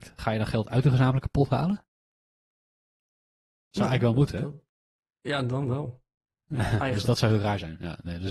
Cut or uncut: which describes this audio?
uncut